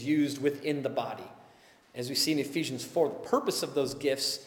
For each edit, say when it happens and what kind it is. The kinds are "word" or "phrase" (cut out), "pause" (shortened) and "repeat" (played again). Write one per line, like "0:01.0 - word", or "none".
none